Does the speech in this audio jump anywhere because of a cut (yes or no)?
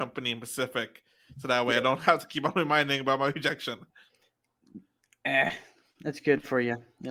no